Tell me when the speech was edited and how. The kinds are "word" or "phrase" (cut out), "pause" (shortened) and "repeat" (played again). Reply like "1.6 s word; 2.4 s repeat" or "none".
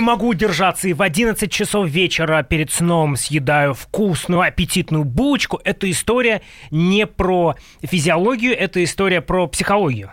none